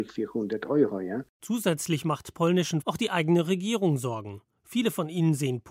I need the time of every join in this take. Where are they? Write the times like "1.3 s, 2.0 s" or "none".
2.8 s